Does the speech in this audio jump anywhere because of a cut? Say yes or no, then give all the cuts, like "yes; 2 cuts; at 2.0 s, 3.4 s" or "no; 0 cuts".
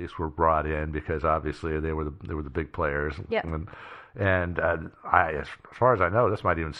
no; 0 cuts